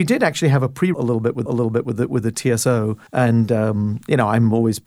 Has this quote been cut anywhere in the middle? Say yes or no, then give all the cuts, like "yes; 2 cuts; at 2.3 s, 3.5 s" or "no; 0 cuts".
yes; 3 cuts; at 0.9 s, 1.5 s, 3.1 s